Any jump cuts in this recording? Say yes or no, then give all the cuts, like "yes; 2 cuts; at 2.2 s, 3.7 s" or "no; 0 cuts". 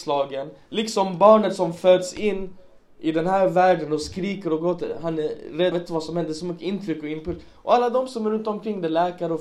yes; 1 cut; at 5.7 s